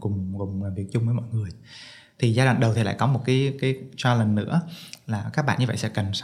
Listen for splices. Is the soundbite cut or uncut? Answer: uncut